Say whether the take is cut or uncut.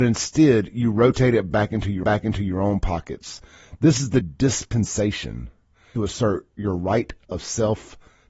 cut